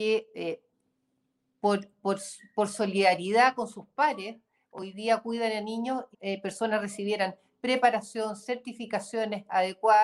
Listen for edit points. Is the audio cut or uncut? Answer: cut